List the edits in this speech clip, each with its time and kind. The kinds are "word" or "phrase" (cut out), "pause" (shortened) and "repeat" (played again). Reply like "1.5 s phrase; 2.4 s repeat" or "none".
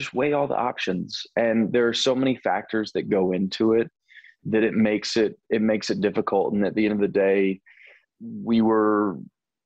8.0 s word